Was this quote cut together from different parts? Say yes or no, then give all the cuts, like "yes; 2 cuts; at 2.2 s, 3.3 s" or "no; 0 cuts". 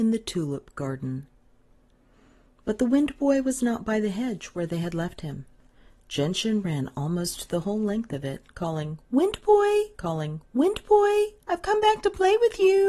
yes; 1 cut; at 10.0 s